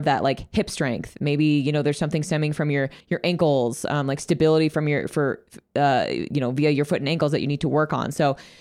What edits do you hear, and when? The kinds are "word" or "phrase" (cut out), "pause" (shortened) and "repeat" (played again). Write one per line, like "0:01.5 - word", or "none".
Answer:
0:03.0 - pause

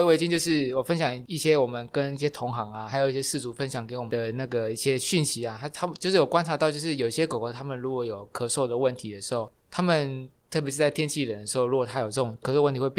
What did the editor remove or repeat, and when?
0:09.6 - pause

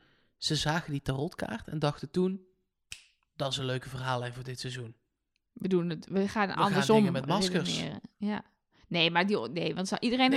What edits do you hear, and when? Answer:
none

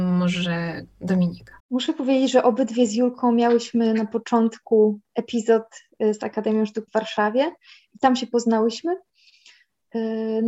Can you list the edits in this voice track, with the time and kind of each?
0:01.6 - pause
0:06.9 - word

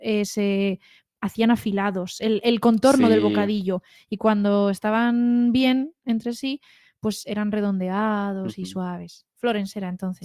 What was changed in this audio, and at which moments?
none

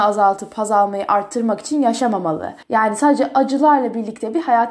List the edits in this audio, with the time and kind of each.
0:02.6 - pause

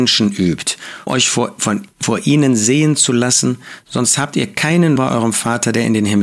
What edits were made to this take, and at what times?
0:01.1 - word
0:05.0 - word

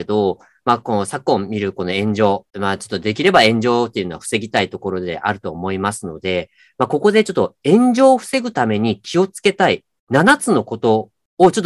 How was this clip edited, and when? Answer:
0:02.5 - pause

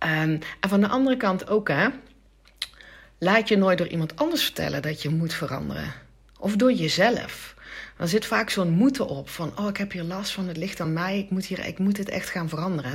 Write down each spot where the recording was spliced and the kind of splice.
none

